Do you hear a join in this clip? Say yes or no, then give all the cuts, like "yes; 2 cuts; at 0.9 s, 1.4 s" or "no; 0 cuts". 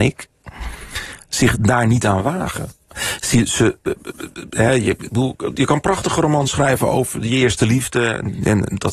no; 0 cuts